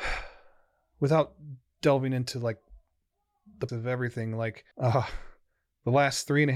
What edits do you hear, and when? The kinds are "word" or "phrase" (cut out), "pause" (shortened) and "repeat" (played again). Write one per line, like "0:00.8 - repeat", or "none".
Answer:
0:03.7 - word
0:04.7 - pause